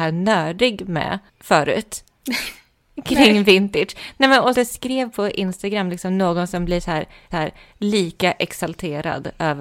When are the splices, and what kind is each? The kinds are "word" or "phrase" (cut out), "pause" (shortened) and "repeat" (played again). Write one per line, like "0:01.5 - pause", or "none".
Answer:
0:01.3 - pause
0:04.5 - word
0:07.3 - repeat